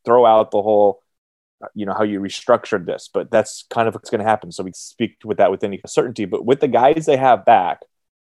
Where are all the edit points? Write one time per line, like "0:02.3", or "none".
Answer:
0:04.0
0:04.7
0:05.8